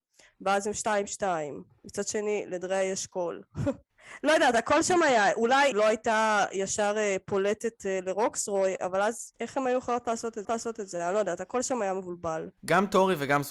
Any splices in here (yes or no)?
yes